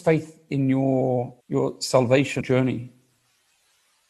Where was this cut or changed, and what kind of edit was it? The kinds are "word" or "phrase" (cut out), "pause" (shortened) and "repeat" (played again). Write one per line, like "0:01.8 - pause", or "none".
0:01.4 - pause
0:02.4 - phrase